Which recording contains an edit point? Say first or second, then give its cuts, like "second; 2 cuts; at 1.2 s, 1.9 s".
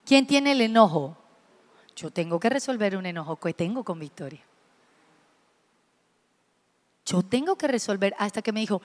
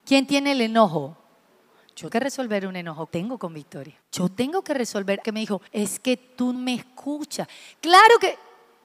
second; 6 cuts; at 2.1 s, 3.1 s, 4.0 s, 5.2 s, 5.7 s, 6.5 s